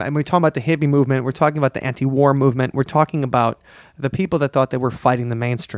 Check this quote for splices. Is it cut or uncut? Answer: uncut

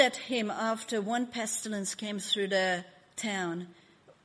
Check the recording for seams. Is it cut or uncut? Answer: uncut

